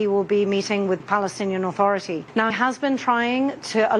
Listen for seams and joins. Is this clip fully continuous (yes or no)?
no